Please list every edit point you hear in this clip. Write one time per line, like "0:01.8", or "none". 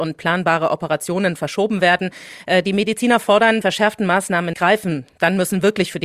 0:03.6
0:04.5